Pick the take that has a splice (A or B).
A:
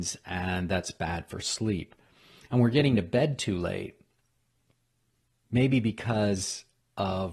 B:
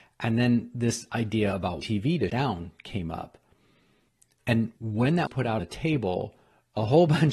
B